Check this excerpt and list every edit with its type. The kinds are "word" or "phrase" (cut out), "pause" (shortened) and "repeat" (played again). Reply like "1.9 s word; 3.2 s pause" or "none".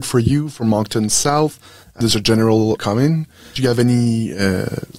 2.0 s word; 2.8 s word